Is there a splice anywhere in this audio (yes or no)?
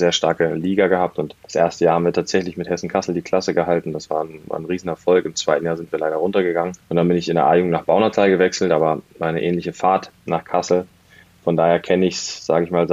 yes